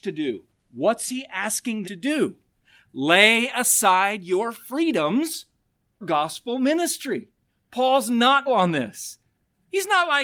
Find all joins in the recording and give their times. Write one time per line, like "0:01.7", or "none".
0:01.8
0:06.0
0:08.5